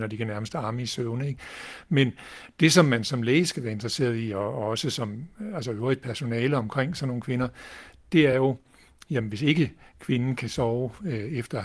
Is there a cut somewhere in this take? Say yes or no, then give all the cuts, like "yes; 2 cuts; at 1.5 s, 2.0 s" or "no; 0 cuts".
no; 0 cuts